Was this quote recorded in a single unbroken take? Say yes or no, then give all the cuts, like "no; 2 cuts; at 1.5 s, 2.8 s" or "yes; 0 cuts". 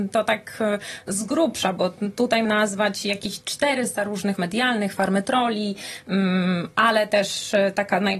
no; 2 cuts; at 2.4 s, 4.4 s